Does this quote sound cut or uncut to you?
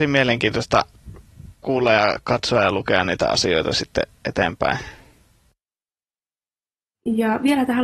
cut